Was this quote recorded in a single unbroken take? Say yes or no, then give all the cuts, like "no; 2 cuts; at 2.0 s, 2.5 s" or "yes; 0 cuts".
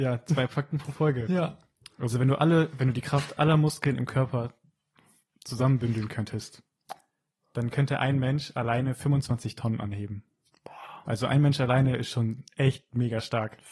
yes; 0 cuts